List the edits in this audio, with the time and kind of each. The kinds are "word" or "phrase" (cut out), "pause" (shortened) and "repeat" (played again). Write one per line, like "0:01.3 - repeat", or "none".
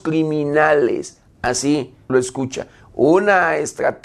0:02.1 - phrase